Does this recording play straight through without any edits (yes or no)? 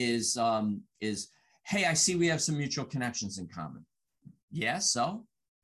no